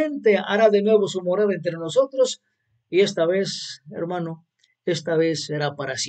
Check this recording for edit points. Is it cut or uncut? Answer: uncut